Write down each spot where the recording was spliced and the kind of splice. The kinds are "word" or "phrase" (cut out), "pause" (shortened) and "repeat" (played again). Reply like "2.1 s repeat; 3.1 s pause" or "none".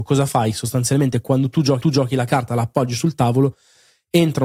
1.8 s repeat